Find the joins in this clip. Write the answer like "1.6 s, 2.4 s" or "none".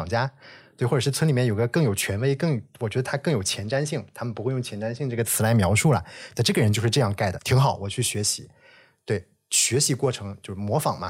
7.4 s